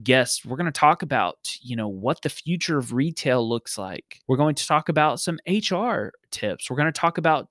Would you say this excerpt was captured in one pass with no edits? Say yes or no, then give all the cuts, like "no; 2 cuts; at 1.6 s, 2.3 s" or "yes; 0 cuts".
no; 1 cut; at 4.2 s